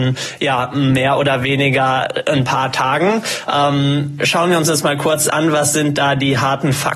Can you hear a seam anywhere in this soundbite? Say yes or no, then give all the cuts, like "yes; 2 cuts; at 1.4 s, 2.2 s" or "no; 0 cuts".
no; 0 cuts